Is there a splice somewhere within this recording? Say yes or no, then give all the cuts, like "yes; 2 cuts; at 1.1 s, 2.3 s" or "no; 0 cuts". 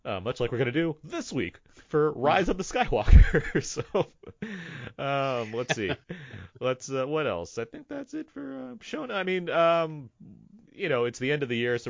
yes; 2 cuts; at 6.0 s, 10.7 s